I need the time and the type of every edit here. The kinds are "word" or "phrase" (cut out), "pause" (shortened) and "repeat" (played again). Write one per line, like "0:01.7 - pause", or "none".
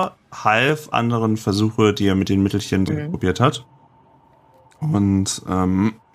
0:00.9 - phrase
0:02.9 - word